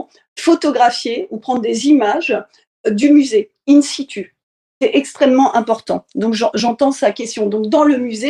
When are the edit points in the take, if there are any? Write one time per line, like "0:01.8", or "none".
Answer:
none